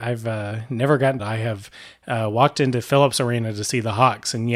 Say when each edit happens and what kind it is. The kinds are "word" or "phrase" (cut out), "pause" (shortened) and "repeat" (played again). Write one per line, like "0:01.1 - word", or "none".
0:01.2 - phrase